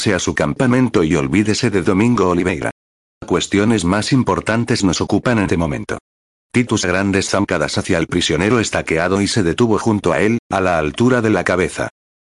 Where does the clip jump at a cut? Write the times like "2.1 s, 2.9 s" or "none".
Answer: 5.5 s, 6.8 s